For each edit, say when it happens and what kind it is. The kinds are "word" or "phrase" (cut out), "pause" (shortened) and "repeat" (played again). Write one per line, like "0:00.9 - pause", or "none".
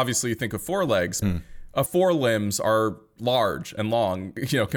0:01.2 - word
0:01.9 - word
0:03.2 - word